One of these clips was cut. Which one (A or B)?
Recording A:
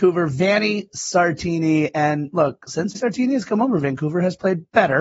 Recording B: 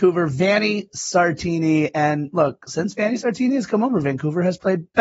A